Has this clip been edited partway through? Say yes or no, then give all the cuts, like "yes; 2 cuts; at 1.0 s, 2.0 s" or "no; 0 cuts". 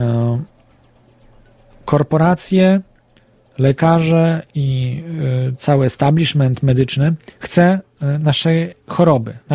no; 0 cuts